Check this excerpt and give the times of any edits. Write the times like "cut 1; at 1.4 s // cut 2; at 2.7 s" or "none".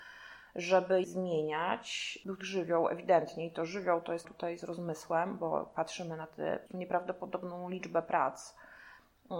cut 1; at 1.0 s // cut 2; at 2.4 s // cut 3; at 4.2 s // cut 4; at 6.7 s